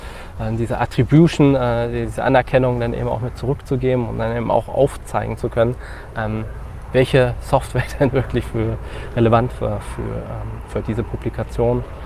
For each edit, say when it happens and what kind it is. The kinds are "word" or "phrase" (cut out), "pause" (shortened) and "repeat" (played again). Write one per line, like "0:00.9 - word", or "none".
none

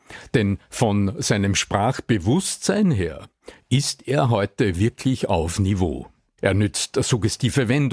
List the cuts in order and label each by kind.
none

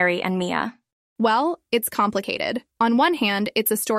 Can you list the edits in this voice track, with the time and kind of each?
0:02.7 - pause

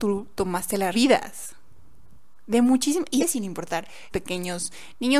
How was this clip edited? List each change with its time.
0:00.9 - phrase
0:03.2 - word
0:04.1 - word

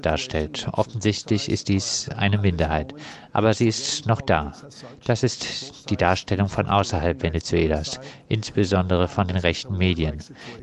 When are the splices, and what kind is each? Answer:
none

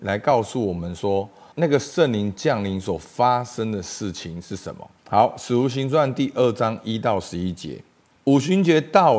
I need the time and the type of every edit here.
0:01.5 - word
0:05.0 - pause
0:08.1 - pause

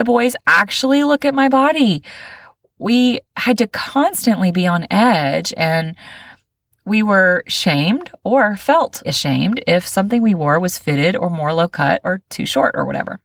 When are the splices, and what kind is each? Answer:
0:09.0 - word

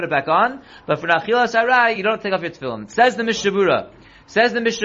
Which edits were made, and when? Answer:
none

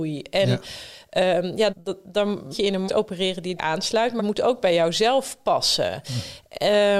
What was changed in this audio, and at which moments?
0:01.7 - word
0:02.5 - word
0:02.9 - word
0:03.6 - word
0:04.2 - word

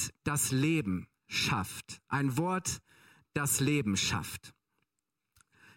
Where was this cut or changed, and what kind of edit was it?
none

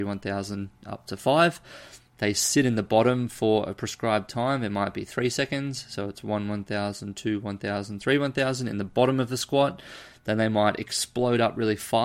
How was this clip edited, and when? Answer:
none

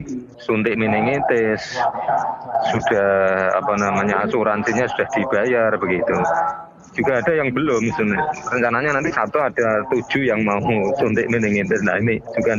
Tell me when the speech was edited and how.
none

